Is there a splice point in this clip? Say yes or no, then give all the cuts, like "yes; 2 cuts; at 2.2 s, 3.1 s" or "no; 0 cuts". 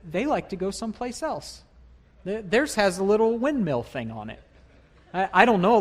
no; 0 cuts